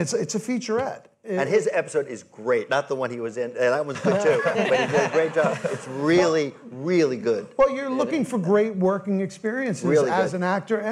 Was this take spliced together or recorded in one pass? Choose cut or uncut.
uncut